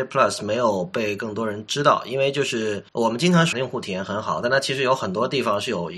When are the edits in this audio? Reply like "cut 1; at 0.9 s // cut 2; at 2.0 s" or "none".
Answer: cut 1; at 2.9 s // cut 2; at 3.5 s